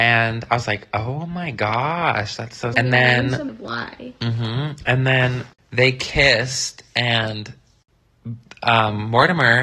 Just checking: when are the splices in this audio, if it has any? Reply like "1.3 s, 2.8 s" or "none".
2.7 s, 3.5 s